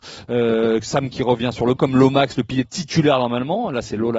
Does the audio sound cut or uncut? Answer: cut